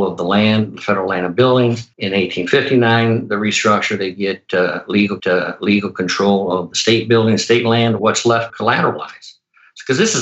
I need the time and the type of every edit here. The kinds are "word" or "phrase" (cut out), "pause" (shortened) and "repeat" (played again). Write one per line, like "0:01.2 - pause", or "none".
0:01.9 - pause
0:05.2 - repeat
0:08.0 - word
0:08.5 - word

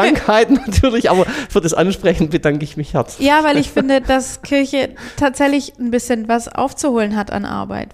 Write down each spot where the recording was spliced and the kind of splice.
0:04.0 - word

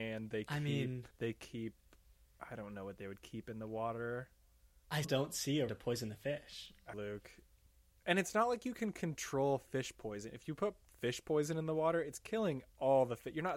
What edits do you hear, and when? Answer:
0:01.1 - pause
0:05.0 - word
0:05.7 - word
0:06.9 - phrase

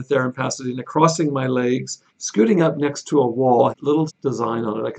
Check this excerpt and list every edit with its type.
0:02.1 - pause
0:03.7 - word
0:04.1 - word

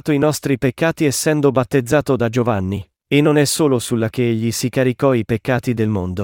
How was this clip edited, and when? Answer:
0:04.1 - word

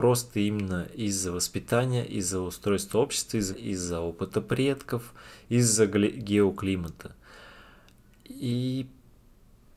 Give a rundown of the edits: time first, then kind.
0:03.5 - word

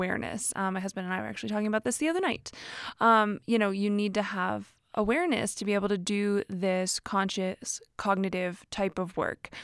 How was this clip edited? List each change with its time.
none

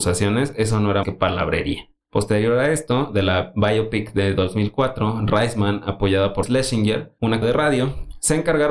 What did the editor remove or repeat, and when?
0:01.0 - word
0:03.1 - phrase
0:06.4 - word
0:07.4 - word

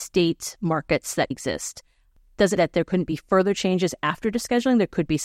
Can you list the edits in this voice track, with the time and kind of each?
0:01.3 - word
0:02.6 - word

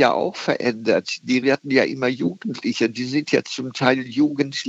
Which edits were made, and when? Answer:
0:01.4 - word

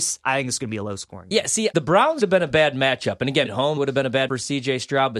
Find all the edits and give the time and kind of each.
0:01.7 - word
0:02.2 - word
0:03.5 - word
0:03.8 - word
0:04.3 - word

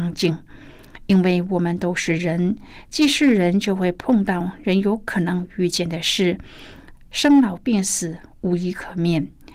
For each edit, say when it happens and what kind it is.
none

